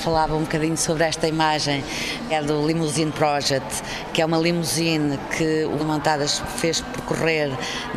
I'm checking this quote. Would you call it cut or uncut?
cut